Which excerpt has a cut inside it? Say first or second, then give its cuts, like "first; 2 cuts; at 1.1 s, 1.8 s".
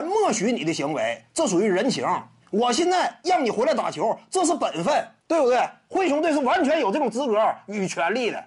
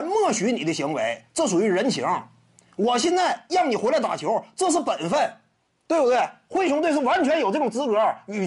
first; 2 cuts; at 2.4 s, 5.2 s